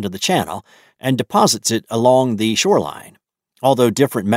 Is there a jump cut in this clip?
no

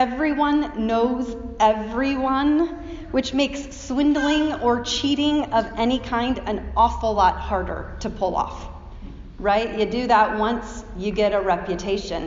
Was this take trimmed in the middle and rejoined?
no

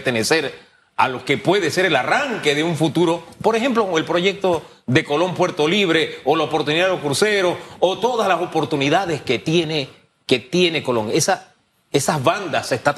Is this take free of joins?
yes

